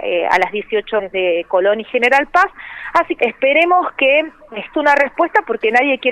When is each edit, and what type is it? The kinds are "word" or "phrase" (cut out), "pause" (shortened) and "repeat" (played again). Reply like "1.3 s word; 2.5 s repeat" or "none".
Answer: 1.0 s word; 3.2 s word; 4.7 s word